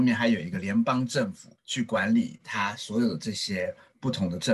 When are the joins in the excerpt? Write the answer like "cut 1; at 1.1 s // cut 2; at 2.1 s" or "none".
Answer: cut 1; at 1.6 s